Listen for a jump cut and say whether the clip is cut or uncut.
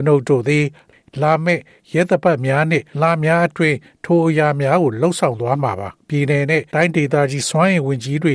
cut